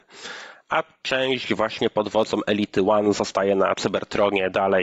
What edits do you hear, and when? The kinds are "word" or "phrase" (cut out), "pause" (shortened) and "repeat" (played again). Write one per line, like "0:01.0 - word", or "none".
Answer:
none